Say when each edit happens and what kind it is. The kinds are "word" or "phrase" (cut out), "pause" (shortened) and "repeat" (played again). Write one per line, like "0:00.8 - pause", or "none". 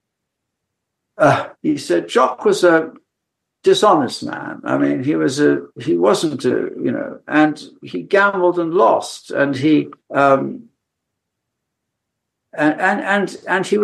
0:01.5 - pause
0:05.7 - pause
0:10.0 - pause